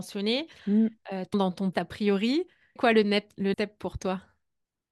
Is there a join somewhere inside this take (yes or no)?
yes